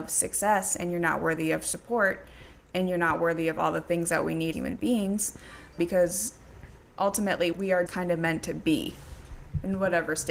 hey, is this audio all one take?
no; 4 cuts; at 4.5 s, 5.8 s, 7.5 s, 7.9 s

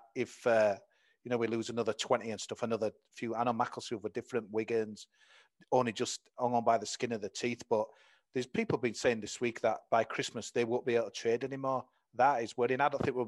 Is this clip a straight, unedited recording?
yes; 0 cuts

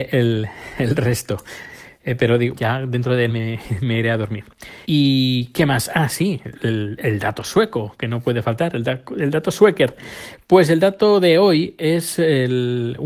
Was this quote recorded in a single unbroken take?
no; 3 cuts; at 2.5 s, 3.3 s, 4.8 s

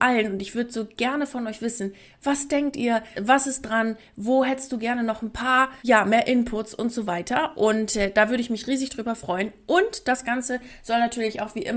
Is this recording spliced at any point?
yes; 2 cuts; at 3.1 s, 5.8 s

